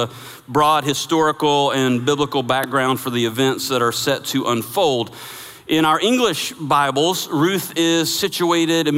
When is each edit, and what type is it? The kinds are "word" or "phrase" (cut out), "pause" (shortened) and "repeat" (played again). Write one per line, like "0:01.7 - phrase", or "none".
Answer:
none